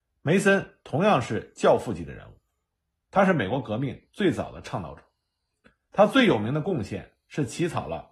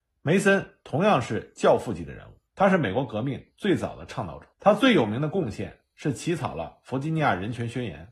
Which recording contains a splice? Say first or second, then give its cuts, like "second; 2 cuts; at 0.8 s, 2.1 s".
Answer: second; 2 cuts; at 2.5 s, 4.5 s